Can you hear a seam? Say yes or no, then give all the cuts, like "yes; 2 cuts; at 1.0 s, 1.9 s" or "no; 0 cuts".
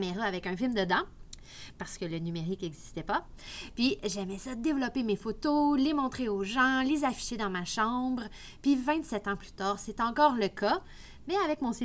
no; 0 cuts